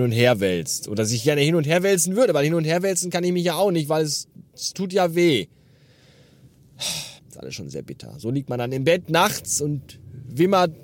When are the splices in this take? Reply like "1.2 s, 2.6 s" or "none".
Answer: 7.2 s